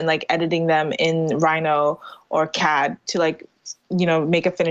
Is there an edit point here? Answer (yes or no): no